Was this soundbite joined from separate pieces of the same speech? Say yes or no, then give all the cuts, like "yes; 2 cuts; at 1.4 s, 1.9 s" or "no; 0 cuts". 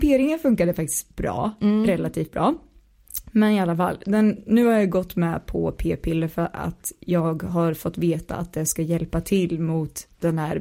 no; 0 cuts